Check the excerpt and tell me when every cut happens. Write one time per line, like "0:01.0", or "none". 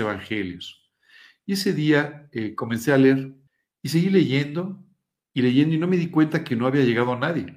0:03.5